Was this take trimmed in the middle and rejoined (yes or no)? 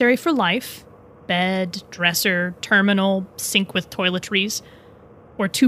no